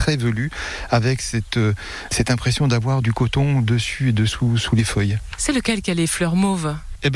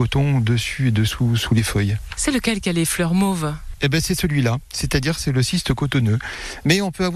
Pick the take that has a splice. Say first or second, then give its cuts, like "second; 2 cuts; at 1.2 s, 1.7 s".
first; 1 cut; at 3.0 s